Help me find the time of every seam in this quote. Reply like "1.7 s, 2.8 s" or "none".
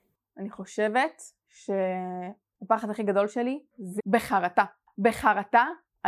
4.0 s